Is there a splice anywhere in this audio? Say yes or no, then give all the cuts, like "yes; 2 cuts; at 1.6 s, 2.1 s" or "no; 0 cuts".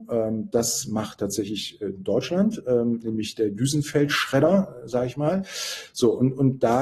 no; 0 cuts